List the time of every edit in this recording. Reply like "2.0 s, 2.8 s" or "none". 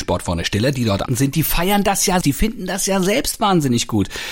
1.1 s, 2.2 s